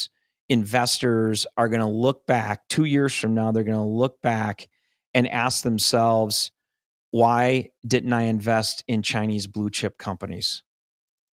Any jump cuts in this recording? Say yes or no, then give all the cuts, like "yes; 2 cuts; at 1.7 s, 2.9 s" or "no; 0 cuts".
no; 0 cuts